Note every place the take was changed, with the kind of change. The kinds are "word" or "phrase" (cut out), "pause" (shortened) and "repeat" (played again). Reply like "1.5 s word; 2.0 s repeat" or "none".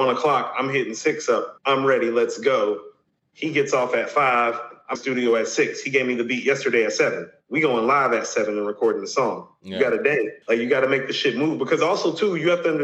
1.6 s word; 4.9 s phrase; 10.4 s pause